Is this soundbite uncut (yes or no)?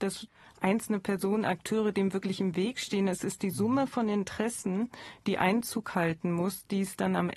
yes